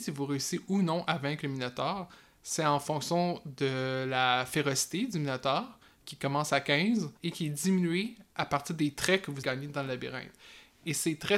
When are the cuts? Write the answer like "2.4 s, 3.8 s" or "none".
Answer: 7.2 s, 9.4 s